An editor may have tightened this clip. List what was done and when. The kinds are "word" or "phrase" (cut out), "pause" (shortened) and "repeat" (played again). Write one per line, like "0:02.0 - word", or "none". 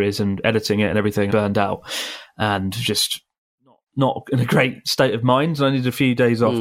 0:01.3 - phrase
0:03.9 - pause